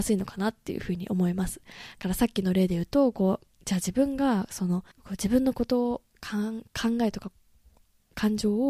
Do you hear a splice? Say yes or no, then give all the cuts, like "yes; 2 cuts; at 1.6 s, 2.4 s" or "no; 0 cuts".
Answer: yes; 2 cuts; at 3.5 s, 4.9 s